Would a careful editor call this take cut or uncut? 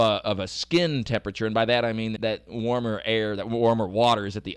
cut